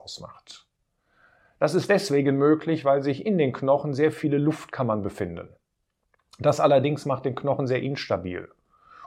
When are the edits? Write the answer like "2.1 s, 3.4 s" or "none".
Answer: none